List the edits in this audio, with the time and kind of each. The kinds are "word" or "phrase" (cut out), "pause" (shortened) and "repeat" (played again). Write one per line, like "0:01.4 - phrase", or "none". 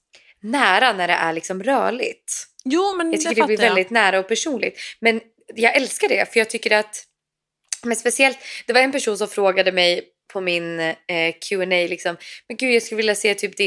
none